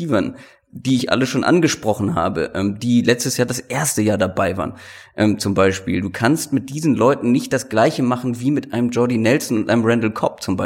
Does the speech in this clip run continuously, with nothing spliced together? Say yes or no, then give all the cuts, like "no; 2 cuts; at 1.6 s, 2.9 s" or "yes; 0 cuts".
yes; 0 cuts